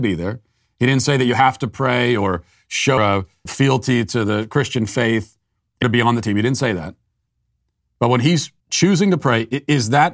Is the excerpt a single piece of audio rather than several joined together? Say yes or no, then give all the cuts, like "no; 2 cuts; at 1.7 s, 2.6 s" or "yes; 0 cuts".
no; 4 cuts; at 3.0 s, 3.5 s, 5.8 s, 8.6 s